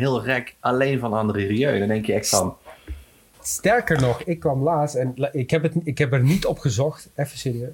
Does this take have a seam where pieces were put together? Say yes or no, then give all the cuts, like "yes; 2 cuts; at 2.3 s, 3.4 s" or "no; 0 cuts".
no; 0 cuts